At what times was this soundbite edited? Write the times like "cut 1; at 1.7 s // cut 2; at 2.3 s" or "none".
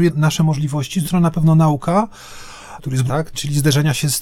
cut 1; at 1.0 s // cut 2; at 2.8 s // cut 3; at 3.1 s

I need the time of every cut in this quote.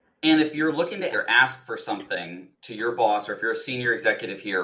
cut 1; at 1.1 s

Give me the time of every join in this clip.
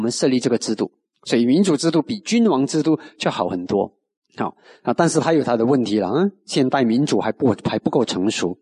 cut 1; at 1.1 s // cut 2; at 4.2 s

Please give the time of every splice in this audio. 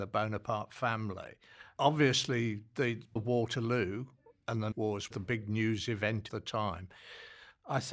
cut 1; at 3.2 s // cut 2; at 4.7 s // cut 3; at 5.1 s // cut 4; at 6.3 s

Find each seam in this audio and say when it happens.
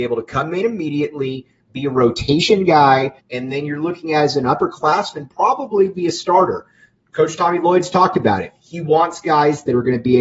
cut 1; at 3.2 s

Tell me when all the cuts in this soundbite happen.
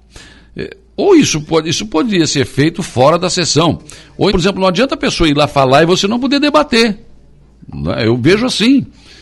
cut 1; at 4.3 s

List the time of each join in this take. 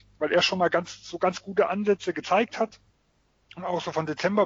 none

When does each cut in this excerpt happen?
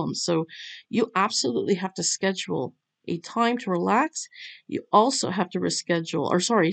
none

